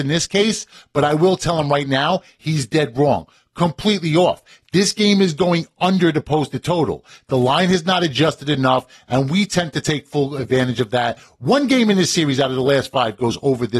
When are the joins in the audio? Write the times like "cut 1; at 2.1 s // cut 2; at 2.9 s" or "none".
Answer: none